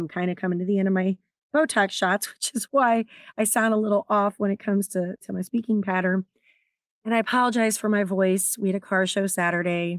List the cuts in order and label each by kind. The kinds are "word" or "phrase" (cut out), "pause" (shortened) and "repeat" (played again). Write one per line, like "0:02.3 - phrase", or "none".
none